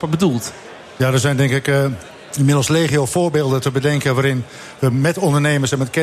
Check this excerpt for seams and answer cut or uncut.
uncut